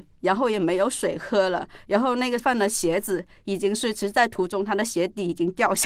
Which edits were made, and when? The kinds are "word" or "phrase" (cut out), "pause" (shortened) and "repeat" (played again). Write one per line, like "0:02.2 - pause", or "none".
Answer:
0:02.4 - word